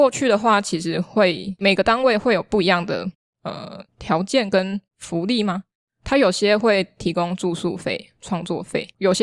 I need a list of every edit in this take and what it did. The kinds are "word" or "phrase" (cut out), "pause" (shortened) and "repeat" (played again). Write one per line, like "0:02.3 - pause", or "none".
0:03.9 - pause
0:04.9 - pause

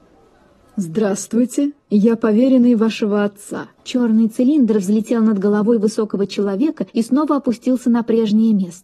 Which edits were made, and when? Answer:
0:03.8 - pause
0:06.9 - pause

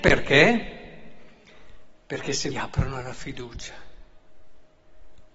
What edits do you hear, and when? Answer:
0:02.5 - phrase

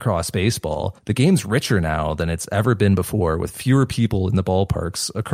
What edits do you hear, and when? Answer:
0:01.0 - pause

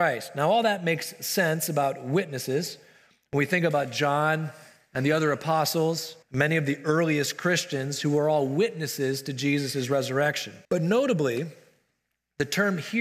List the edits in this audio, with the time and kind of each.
0:06.2 - pause
0:10.6 - pause

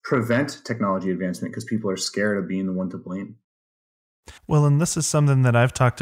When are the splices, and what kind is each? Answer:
0:04.4 - pause

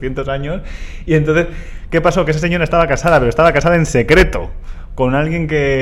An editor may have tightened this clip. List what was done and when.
none

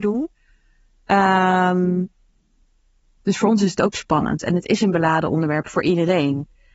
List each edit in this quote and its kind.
none

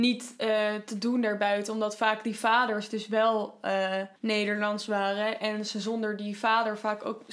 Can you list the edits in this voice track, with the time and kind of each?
0:04.2 - pause

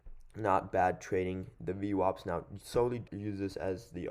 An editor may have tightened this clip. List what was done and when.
0:03.1 - word

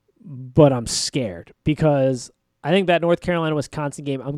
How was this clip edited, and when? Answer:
none

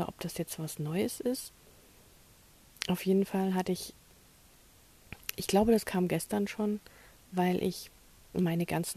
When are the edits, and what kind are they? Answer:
none

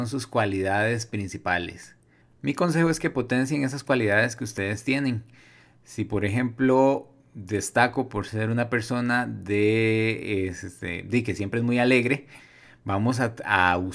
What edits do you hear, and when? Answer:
0:02.2 - pause

